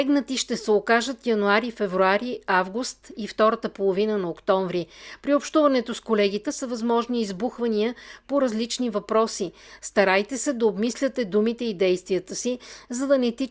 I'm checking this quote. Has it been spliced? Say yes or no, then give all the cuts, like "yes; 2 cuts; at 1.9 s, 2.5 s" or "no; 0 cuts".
yes; 1 cut; at 6.4 s